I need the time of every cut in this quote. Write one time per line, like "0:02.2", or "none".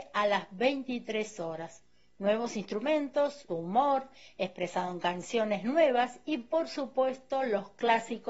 0:03.5